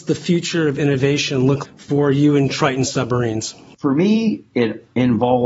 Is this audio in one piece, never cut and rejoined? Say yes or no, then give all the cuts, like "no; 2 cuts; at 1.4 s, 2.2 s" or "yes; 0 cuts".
no; 1 cut; at 1.6 s